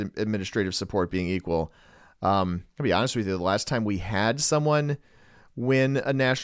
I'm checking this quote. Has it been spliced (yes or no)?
no